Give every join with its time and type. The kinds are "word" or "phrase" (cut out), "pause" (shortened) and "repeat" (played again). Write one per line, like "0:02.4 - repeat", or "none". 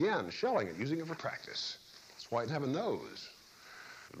0:01.2 - word
0:02.5 - word